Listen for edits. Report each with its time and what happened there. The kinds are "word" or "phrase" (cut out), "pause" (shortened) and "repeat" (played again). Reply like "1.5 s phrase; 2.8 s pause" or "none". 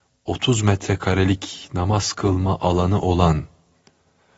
none

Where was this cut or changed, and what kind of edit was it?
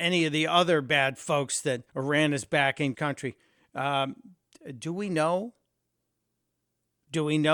1.9 s pause; 2.9 s phrase

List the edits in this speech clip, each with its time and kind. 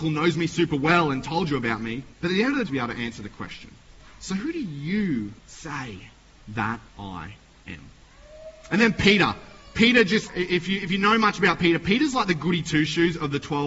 2.1 s pause; 2.7 s phrase; 3.8 s pause; 5.4 s pause; 6.9 s pause; 10.3 s word

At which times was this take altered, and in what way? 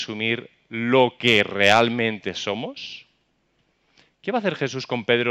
none

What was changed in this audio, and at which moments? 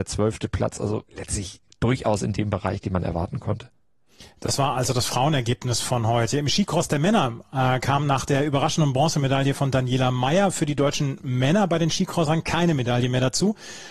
1.1 s pause

